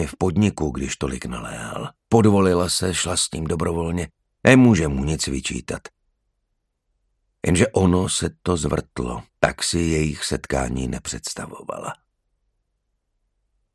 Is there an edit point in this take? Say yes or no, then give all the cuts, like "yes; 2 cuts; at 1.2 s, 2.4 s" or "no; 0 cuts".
yes; 3 cuts; at 2.0 s, 4.2 s, 9.3 s